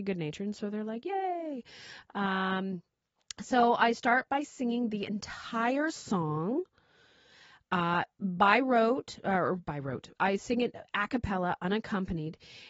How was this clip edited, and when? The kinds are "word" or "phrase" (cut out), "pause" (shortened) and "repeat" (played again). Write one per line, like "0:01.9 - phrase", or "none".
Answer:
none